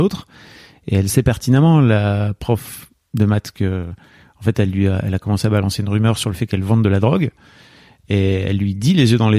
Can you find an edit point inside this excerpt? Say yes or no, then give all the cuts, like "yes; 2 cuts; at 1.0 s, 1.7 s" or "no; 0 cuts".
no; 0 cuts